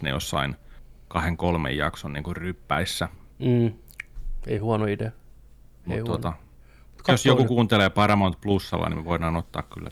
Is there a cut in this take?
no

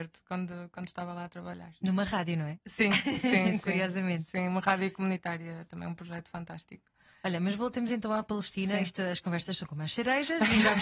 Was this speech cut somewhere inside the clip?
no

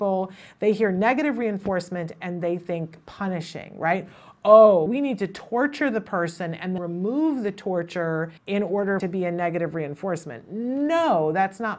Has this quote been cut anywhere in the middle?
yes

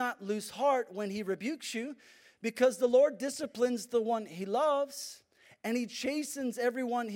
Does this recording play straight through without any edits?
yes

